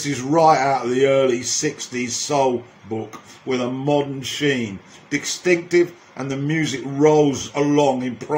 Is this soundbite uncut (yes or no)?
yes